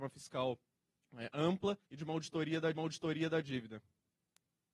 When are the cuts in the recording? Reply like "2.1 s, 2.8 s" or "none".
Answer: 1.8 s, 2.7 s